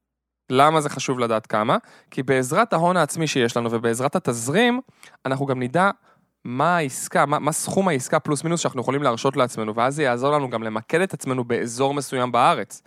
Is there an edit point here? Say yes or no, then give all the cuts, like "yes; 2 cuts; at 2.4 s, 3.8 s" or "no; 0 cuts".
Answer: no; 0 cuts